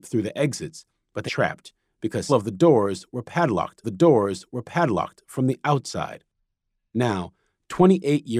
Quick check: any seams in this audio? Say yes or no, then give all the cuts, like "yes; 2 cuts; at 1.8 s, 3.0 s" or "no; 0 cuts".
yes; 3 cuts; at 1.3 s, 2.3 s, 3.8 s